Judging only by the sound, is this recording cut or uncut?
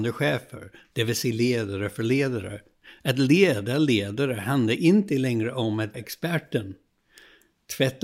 cut